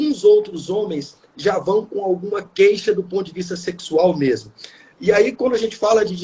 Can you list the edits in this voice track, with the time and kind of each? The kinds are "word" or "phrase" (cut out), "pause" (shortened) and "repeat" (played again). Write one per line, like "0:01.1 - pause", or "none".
none